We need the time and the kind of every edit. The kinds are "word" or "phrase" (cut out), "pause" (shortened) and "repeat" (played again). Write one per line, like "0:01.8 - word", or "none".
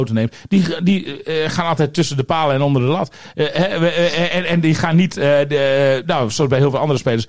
none